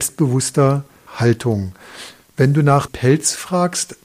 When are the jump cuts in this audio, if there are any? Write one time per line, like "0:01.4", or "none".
0:01.1
0:02.9